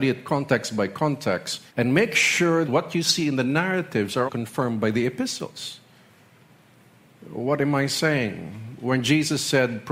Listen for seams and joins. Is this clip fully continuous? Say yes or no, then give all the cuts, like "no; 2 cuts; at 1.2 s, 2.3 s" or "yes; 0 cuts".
no; 3 cuts; at 1.7 s, 2.6 s, 4.3 s